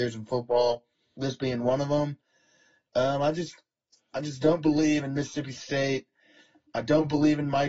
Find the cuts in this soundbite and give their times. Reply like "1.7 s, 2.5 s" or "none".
none